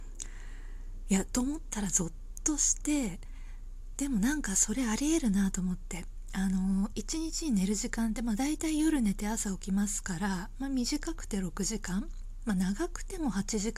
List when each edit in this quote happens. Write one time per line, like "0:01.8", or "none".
0:06.9